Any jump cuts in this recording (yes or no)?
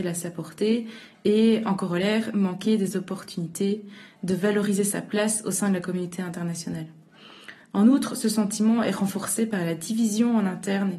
no